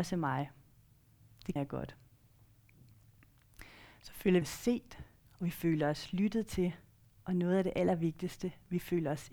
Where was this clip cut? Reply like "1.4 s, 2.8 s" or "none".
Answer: 1.6 s, 4.4 s